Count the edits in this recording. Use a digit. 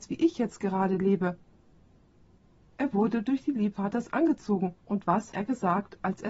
3